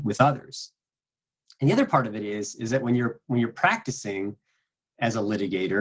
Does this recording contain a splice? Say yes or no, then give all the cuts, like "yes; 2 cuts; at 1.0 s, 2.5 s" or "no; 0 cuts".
no; 0 cuts